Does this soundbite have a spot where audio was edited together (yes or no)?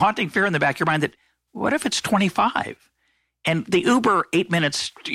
no